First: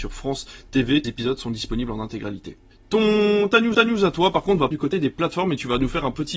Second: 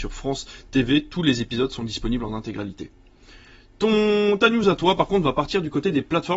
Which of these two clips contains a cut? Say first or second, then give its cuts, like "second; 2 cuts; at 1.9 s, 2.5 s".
first; 4 cuts; at 1.0 s, 2.7 s, 3.7 s, 4.7 s